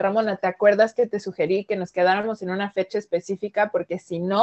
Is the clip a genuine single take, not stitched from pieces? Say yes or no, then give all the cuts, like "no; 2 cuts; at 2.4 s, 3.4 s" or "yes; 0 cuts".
yes; 0 cuts